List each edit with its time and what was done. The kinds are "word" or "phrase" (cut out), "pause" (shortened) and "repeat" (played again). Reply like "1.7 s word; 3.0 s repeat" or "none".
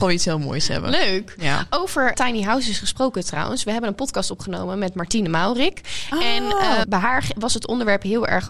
2.1 s word; 6.8 s word